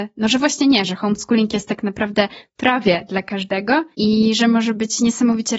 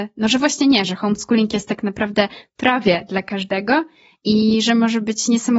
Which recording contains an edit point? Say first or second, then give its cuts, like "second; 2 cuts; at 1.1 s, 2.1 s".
first; 1 cut; at 3.9 s